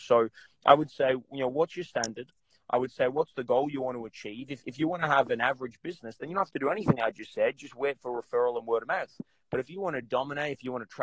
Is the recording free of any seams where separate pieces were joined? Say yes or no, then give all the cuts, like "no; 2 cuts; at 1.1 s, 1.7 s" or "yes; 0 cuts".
yes; 0 cuts